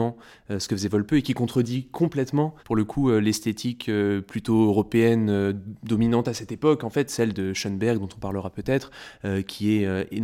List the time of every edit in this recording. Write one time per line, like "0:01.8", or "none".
0:02.6